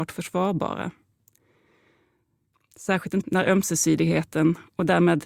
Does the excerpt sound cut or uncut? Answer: cut